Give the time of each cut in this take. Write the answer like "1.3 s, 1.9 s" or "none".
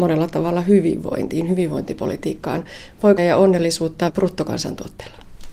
3.2 s, 4.1 s

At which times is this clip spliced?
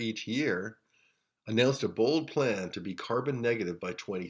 none

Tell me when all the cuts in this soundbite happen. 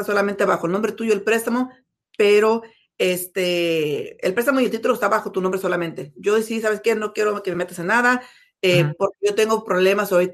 none

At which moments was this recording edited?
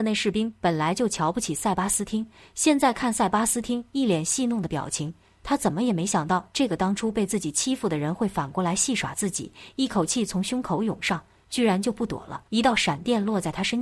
12.5 s

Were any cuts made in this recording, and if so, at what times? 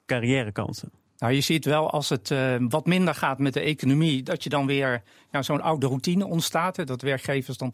none

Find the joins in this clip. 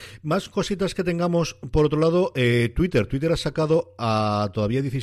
none

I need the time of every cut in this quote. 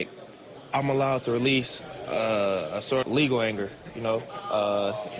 3.0 s

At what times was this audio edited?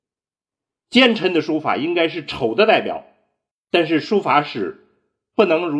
3.5 s

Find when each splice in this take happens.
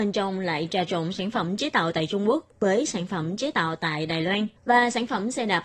4.6 s

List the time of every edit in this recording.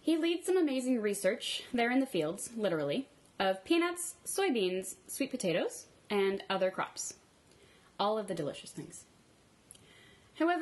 none

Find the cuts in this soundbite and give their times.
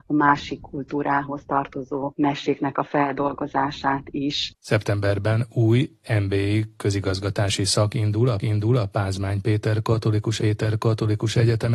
8.4 s, 10.4 s

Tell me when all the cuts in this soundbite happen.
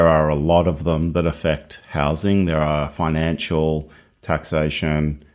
none

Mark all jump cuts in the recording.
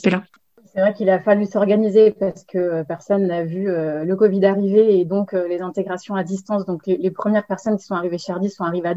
none

